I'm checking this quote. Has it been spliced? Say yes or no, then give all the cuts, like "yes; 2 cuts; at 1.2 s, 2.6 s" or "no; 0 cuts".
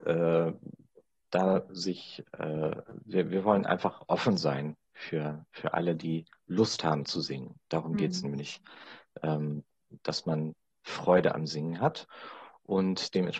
no; 0 cuts